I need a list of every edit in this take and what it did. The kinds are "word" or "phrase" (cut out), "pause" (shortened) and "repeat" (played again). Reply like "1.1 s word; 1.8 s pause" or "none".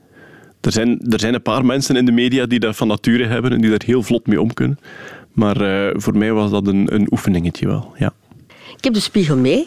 none